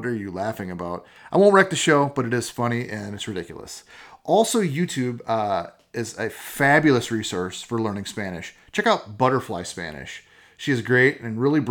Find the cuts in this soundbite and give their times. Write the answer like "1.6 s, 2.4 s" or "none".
none